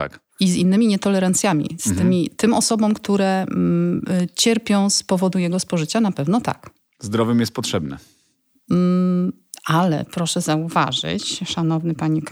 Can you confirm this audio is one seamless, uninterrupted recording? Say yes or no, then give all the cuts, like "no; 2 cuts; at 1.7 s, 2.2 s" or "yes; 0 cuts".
yes; 0 cuts